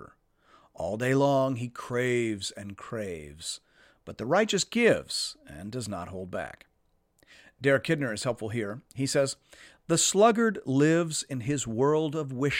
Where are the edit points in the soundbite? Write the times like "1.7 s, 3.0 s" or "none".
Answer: none